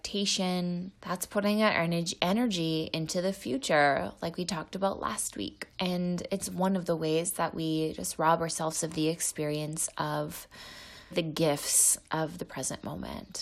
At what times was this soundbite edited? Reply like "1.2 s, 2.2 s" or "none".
1.0 s, 5.7 s, 11.1 s